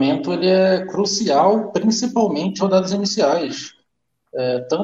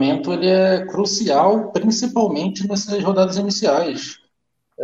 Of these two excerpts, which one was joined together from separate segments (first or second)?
first